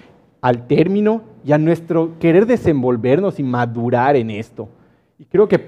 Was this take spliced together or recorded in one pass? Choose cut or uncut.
uncut